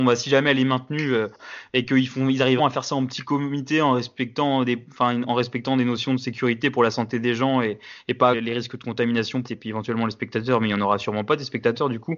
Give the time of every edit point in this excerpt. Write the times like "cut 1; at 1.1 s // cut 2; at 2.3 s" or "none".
cut 1; at 2.6 s // cut 2; at 8.3 s // cut 3; at 9.5 s

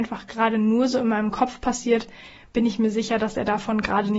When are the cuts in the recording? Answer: none

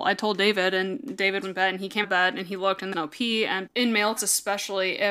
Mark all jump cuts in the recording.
cut 1; at 1.4 s // cut 2; at 2.0 s // cut 3; at 2.9 s // cut 4; at 3.7 s // cut 5; at 4.2 s

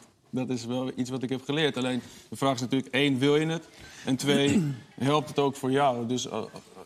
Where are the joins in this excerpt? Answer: cut 1; at 4.9 s

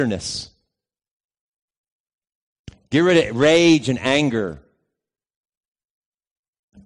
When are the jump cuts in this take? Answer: none

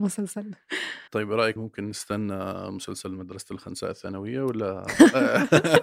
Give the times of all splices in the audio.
cut 1; at 1.1 s // cut 2; at 1.6 s

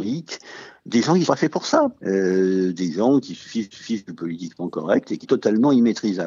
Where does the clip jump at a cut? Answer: cut 1; at 1.3 s // cut 2; at 2.0 s // cut 3; at 3.7 s // cut 4; at 5.2 s

